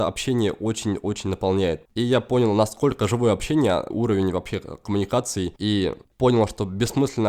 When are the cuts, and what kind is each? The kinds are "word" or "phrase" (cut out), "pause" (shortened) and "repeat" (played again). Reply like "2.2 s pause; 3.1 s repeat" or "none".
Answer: 1.8 s pause; 3.9 s phrase; 5.6 s pause

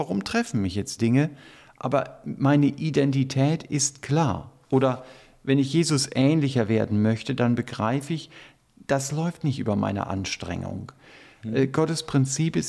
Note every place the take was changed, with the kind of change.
1.0 s word

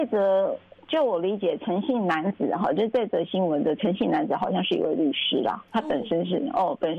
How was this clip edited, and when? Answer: 5.7 s word

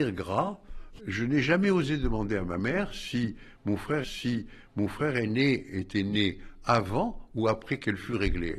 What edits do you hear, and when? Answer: 1.0 s word; 4.0 s repeat

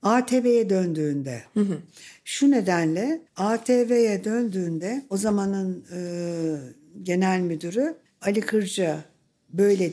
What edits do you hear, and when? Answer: 3.3 s pause; 8.1 s pause

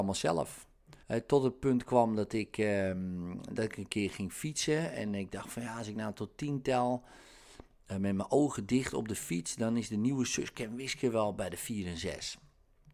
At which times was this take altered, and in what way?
1.0 s pause

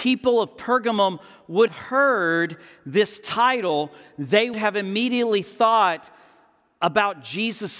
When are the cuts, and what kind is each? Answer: 1.7 s word; 4.5 s word

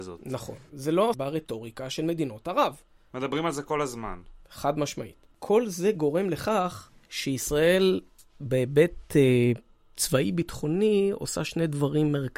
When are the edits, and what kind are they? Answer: 1.1 s phrase; 5.3 s pause

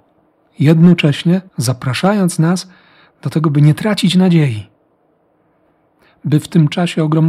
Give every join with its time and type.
1.5 s pause

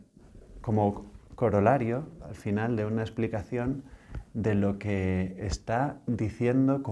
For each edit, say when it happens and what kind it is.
none

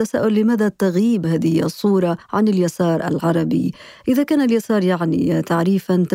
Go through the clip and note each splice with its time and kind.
2.2 s pause

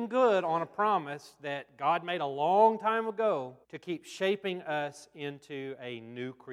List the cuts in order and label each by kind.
3.6 s pause

